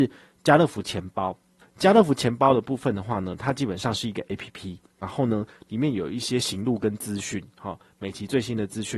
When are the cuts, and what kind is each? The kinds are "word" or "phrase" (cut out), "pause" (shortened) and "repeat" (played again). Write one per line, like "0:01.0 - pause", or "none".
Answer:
none